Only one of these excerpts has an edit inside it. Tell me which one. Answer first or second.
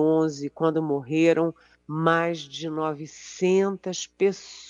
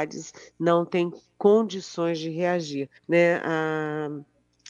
second